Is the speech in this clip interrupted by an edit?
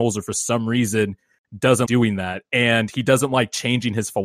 yes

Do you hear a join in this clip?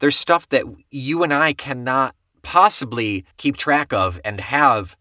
yes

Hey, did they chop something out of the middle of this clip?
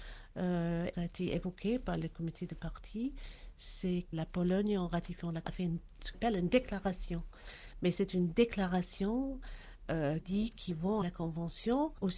yes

